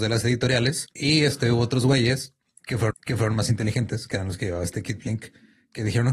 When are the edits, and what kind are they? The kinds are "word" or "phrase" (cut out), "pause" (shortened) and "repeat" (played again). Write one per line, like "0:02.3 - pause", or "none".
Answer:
0:00.9 - pause
0:02.9 - repeat